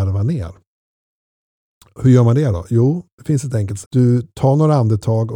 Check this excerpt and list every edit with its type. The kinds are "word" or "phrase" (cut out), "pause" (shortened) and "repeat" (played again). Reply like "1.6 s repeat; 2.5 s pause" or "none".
3.8 s word